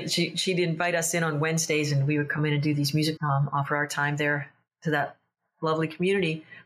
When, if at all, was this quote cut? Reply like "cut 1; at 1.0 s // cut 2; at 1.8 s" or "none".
cut 1; at 3.2 s